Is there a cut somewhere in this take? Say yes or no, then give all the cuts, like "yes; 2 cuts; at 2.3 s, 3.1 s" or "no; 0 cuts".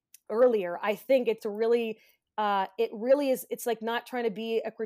yes; 1 cut; at 1.4 s